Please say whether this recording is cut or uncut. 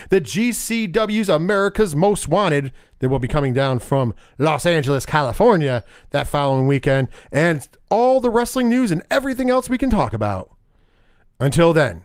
uncut